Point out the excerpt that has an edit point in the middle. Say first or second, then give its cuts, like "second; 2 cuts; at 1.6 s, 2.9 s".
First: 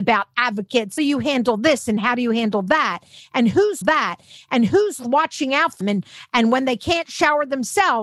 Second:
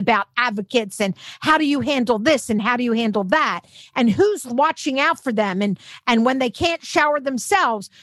first; 3 cuts; at 1.0 s, 3.8 s, 5.8 s